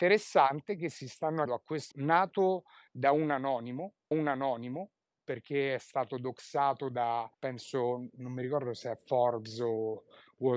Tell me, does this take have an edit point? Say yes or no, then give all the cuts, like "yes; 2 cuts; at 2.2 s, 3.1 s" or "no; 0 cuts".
yes; 4 cuts; at 1.5 s, 1.9 s, 4.1 s, 7.3 s